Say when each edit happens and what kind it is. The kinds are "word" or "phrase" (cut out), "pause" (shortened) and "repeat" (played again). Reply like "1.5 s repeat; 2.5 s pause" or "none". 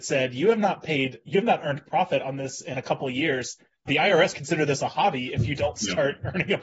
3.9 s word; 4.3 s word